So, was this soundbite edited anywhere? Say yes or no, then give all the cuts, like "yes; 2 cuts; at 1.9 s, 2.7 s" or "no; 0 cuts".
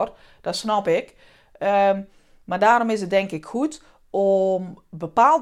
no; 0 cuts